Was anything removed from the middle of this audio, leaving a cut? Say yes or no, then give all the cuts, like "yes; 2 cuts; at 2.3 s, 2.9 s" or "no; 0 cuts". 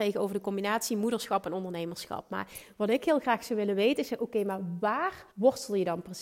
yes; 1 cut; at 5.3 s